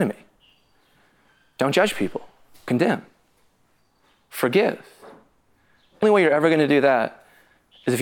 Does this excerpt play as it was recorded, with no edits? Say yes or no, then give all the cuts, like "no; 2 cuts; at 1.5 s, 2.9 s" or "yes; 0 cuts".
no; 2 cuts; at 2.7 s, 6.0 s